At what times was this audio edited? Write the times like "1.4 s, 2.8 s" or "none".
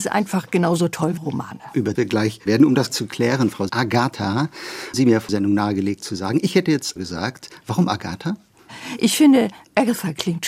1.2 s, 1.9 s, 2.5 s, 2.9 s, 3.7 s, 4.9 s, 5.3 s, 7.0 s